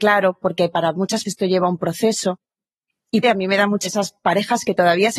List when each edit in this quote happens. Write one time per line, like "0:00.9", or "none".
0:01.2
0:03.2
0:03.8